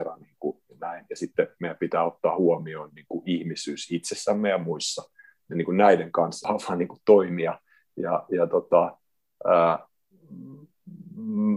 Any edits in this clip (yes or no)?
no